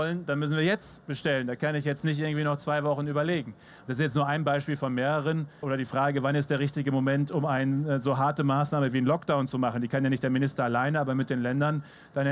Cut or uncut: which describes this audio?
cut